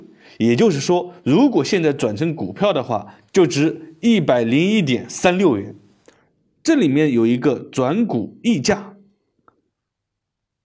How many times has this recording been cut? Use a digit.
0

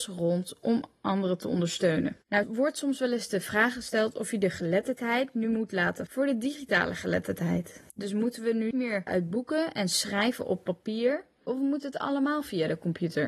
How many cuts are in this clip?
5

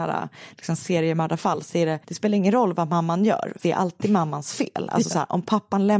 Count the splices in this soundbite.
2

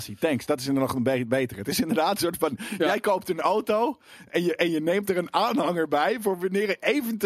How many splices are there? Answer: 0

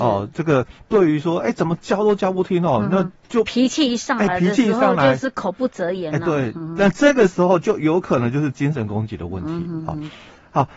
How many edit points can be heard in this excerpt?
0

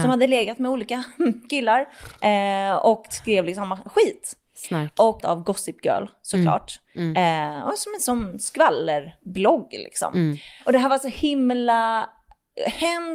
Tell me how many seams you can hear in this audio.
1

